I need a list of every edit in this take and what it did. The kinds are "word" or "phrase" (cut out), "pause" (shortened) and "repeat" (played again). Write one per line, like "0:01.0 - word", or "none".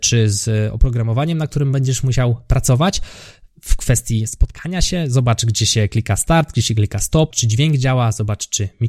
0:07.3 - word